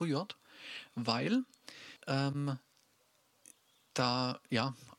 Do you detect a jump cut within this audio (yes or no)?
yes